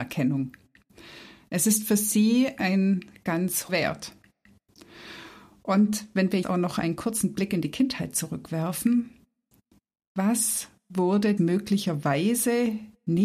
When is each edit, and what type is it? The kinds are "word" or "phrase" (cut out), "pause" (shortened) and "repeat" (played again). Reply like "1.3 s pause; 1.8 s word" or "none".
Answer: 3.7 s word; 6.4 s word; 11.4 s word

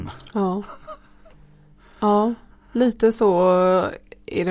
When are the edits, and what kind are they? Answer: none

